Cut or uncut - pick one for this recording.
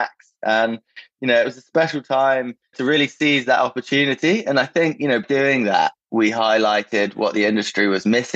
cut